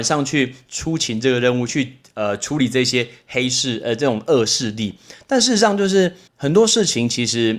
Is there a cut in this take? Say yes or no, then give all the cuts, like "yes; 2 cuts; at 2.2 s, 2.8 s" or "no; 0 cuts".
yes; 1 cut; at 6.3 s